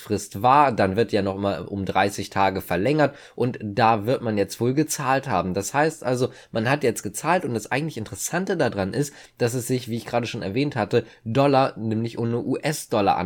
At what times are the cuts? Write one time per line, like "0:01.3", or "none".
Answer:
none